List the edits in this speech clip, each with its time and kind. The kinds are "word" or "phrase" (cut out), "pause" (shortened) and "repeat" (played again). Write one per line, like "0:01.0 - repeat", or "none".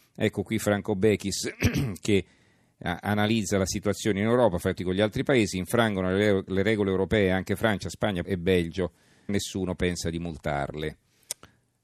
0:04.8 - word
0:08.2 - word
0:09.3 - word